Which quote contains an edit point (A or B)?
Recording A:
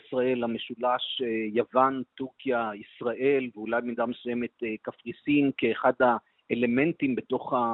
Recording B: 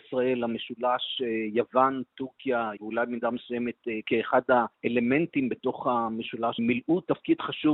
B